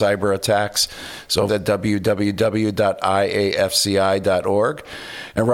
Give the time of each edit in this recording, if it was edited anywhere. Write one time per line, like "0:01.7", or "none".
0:01.5